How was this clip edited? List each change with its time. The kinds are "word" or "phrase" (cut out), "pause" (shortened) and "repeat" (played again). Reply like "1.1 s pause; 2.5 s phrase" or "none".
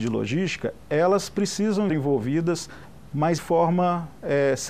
1.9 s word; 3.4 s word